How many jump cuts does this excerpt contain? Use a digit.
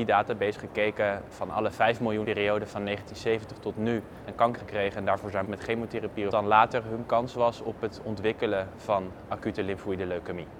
5